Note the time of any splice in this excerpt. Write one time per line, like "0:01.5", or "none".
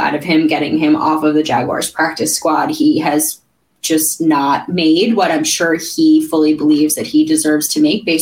none

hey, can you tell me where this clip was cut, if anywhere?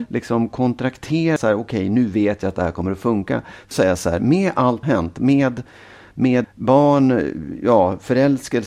0:01.4
0:03.7
0:04.8
0:06.4

